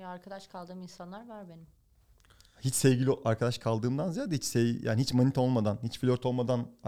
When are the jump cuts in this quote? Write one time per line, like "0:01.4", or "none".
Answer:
none